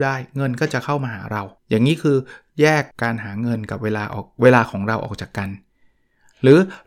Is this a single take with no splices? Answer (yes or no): no